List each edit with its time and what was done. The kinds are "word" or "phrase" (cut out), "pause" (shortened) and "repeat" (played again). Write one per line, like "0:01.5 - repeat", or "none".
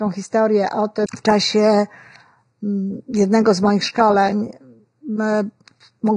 0:01.1 - word

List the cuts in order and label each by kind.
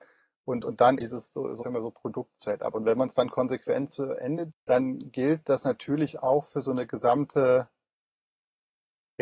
0:01.0 - word
0:01.6 - word
0:04.5 - word

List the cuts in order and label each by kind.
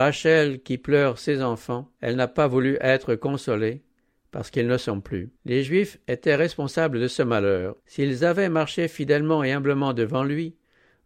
0:01.9 - pause
0:05.4 - pause
0:07.8 - pause

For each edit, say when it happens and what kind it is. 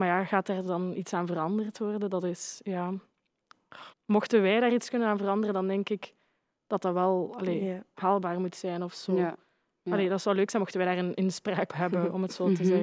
0:03.9 - pause
0:11.7 - word

